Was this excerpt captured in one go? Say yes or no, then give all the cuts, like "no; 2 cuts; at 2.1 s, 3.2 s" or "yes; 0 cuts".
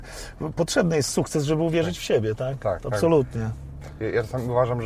yes; 0 cuts